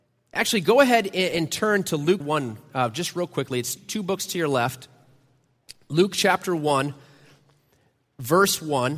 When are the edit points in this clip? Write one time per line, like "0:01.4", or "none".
0:02.2
0:03.8